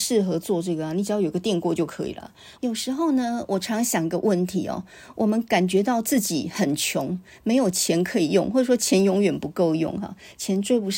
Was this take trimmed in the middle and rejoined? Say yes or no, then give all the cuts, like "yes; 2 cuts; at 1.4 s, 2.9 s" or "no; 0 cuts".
yes; 1 cut; at 2.5 s